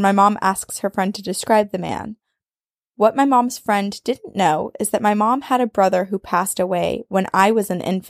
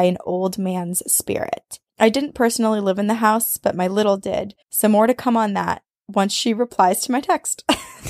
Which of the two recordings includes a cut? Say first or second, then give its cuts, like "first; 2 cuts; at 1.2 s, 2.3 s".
second; 2 cuts; at 1.9 s, 4.6 s